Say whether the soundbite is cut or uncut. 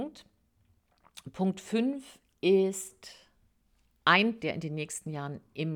cut